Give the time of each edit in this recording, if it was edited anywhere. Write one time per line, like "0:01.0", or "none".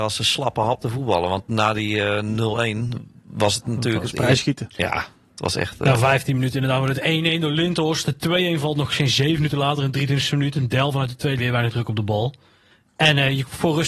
0:11.4